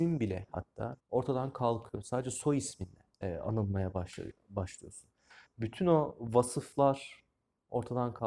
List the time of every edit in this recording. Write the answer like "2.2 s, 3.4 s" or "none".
1.0 s, 3.1 s